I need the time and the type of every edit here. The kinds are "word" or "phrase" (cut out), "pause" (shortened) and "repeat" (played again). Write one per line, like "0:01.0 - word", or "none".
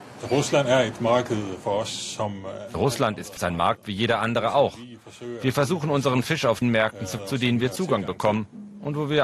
0:03.4 - word
0:06.6 - word
0:07.2 - word